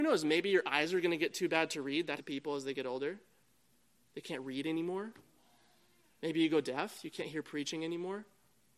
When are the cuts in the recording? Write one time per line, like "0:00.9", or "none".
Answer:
0:02.2